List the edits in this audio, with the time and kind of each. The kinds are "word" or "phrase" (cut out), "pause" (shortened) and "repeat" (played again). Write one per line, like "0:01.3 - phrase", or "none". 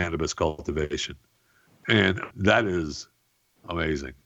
0:02.3 - word